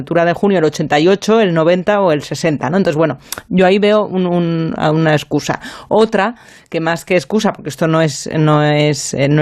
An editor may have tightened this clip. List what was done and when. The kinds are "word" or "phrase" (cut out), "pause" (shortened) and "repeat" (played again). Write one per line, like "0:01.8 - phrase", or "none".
none